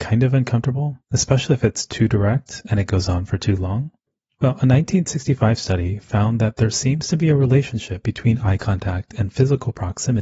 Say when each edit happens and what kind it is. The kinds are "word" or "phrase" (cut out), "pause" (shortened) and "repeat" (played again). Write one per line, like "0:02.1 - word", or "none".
0:01.0 - pause
0:04.1 - pause